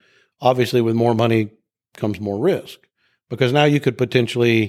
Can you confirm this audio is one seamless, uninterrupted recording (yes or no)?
yes